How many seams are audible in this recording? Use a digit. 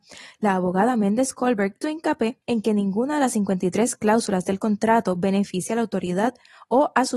2